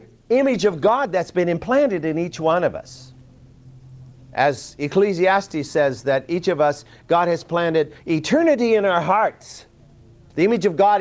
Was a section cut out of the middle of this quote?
no; 0 cuts

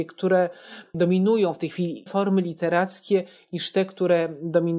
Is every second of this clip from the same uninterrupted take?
no; 1 cut; at 2.1 s

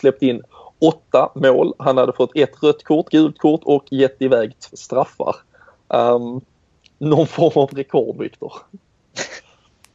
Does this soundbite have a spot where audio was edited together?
yes; 3 cuts; at 3.1 s, 3.9 s, 4.7 s

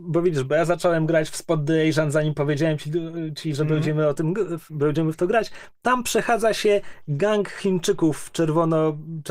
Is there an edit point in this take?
no; 0 cuts

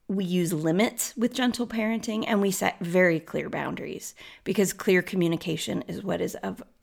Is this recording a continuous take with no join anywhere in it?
yes; 0 cuts

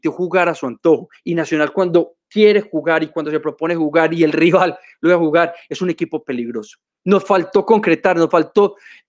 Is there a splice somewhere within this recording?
no; 0 cuts

